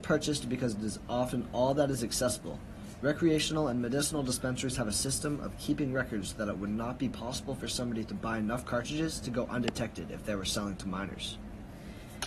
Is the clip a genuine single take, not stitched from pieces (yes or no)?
yes